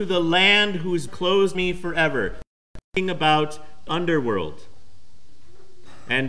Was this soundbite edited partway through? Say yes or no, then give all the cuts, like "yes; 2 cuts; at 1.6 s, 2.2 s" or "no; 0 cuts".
yes; 4 cuts; at 1.1 s, 1.5 s, 2.8 s, 3.9 s